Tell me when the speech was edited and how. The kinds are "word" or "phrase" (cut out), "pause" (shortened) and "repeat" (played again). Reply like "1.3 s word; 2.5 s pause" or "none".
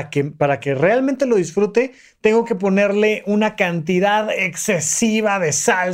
none